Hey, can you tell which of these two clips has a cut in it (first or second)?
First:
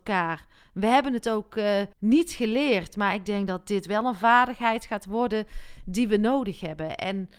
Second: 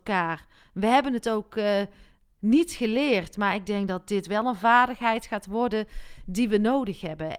first